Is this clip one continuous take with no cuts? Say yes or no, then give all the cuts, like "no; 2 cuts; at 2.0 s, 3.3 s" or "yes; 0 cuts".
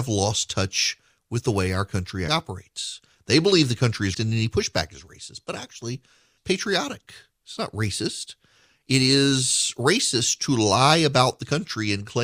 no; 3 cuts; at 2.3 s, 4.1 s, 6.4 s